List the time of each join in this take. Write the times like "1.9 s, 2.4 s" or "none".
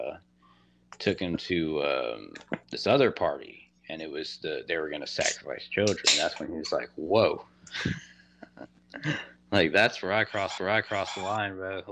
2.6 s, 10.6 s